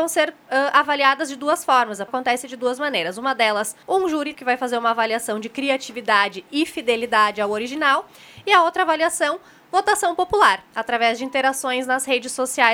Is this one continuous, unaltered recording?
no; 3 cuts; at 2.1 s, 3.8 s, 4.3 s

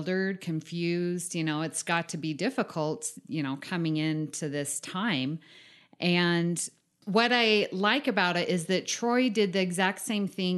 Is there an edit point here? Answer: no; 0 cuts

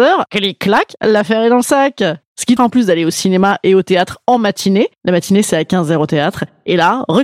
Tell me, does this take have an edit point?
yes; 1 cut; at 2.6 s

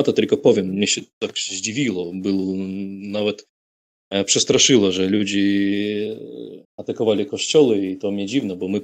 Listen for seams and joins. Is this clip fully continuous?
no; 1 cut; at 6.6 s

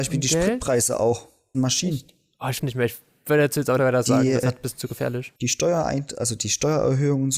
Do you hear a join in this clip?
yes; 5 cuts; at 1.5 s, 2.6 s, 3.8 s, 4.4 s, 5.4 s

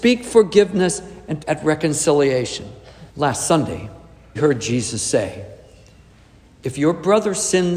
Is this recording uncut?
no; 3 cuts; at 1.4 s, 3.1 s, 4.4 s

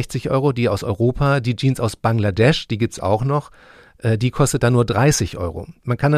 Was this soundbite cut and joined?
no; 0 cuts

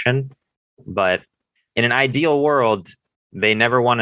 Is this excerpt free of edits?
yes; 0 cuts

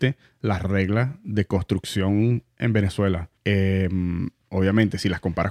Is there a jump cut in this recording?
yes; 1 cut; at 3.4 s

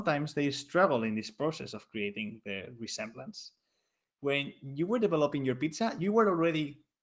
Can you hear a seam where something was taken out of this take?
no; 0 cuts

